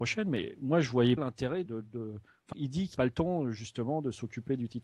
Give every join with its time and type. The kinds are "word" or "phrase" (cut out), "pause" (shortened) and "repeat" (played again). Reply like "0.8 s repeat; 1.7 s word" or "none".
1.2 s word; 1.7 s word; 2.5 s word; 2.9 s word